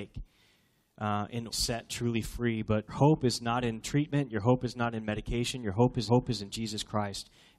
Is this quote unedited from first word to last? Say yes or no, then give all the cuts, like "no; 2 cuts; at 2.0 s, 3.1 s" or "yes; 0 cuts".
no; 3 cuts; at 1.5 s, 2.9 s, 6.1 s